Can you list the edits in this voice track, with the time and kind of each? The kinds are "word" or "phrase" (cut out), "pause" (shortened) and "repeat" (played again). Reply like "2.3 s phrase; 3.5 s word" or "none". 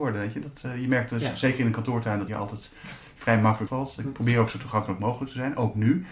2.3 s word; 3.7 s word